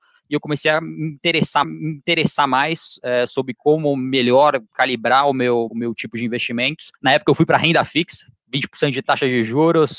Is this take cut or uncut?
cut